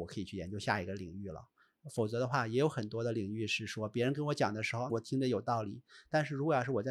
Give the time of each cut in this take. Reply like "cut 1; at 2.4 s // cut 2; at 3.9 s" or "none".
cut 1; at 4.9 s